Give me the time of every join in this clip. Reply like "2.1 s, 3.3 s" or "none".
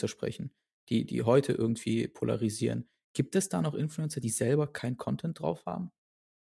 none